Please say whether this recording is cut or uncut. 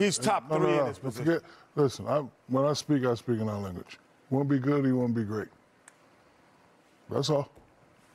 uncut